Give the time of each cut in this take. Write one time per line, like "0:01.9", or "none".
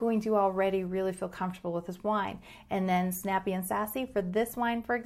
none